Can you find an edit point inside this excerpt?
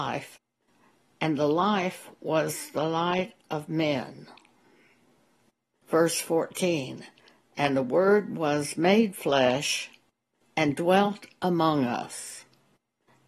no; 0 cuts

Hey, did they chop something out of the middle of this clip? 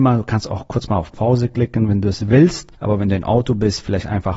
no; 0 cuts

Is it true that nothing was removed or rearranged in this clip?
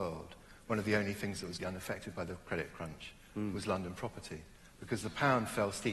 no; 1 cut; at 1.6 s

